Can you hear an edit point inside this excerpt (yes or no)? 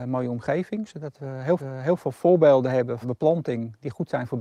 yes